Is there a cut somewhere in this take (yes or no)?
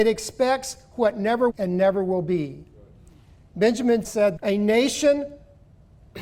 yes